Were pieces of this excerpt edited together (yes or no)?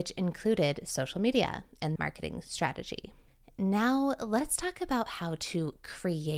yes